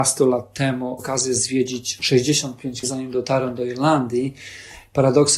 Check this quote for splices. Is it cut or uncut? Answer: cut